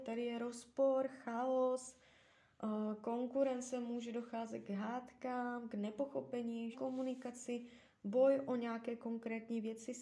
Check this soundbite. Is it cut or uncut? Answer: cut